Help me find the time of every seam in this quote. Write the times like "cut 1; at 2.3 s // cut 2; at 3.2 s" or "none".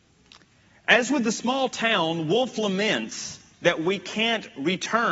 cut 1; at 3.5 s

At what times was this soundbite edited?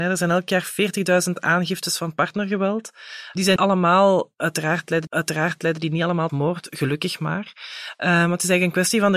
cut 1; at 3.6 s // cut 2; at 5.1 s // cut 3; at 6.3 s

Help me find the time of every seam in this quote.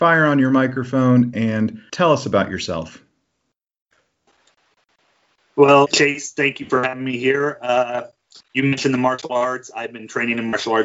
cut 1; at 1.9 s // cut 2; at 5.9 s

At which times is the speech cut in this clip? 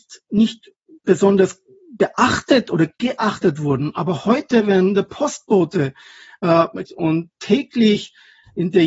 cut 1; at 6.9 s

